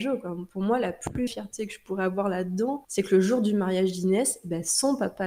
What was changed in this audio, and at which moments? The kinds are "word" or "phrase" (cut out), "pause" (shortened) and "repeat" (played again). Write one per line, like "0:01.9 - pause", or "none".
0:01.3 - word